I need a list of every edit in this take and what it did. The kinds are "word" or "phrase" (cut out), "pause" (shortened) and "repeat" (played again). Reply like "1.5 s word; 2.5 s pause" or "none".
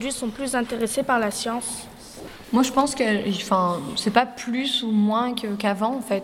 none